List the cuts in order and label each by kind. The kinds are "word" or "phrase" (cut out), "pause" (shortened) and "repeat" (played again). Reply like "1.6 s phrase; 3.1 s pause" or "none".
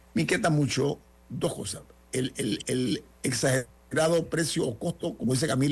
none